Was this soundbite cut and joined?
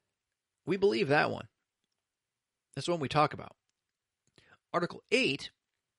no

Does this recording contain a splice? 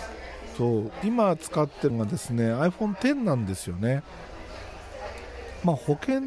yes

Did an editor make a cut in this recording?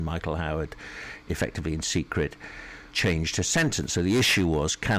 yes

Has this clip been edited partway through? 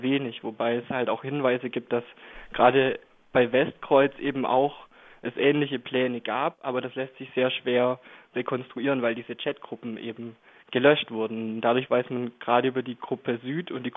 no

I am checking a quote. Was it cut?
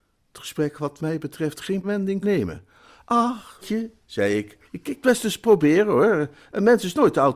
yes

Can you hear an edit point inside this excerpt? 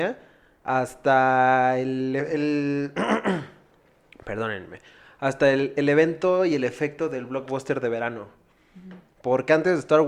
no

